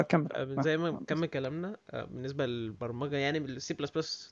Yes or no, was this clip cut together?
no